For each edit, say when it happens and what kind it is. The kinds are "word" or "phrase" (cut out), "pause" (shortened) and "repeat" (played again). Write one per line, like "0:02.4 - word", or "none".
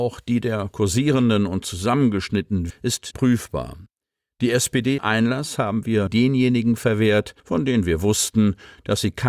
0:02.7 - word
0:03.1 - word
0:05.0 - phrase
0:06.1 - word
0:07.4 - pause